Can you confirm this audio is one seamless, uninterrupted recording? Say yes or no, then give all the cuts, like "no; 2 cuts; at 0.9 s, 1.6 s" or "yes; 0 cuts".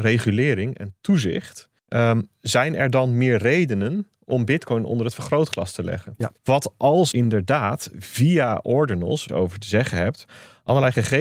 no; 4 cuts; at 1.8 s, 6.4 s, 7.1 s, 9.3 s